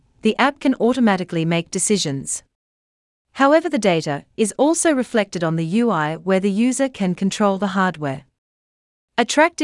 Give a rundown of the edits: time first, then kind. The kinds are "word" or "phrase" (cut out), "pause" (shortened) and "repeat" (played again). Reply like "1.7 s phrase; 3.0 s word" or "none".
none